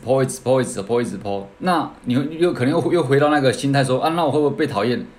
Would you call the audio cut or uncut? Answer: cut